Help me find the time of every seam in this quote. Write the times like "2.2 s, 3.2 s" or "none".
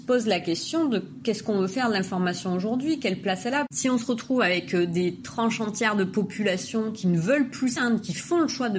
7.8 s